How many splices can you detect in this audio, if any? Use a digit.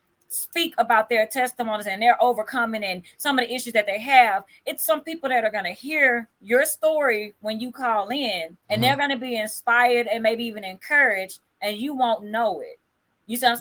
2